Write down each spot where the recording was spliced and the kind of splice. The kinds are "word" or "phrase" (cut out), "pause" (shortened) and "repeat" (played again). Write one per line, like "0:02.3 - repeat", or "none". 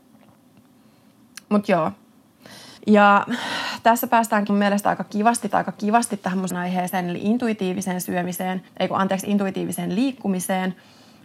0:02.8 - pause
0:04.5 - word
0:05.5 - repeat
0:06.5 - word
0:08.7 - pause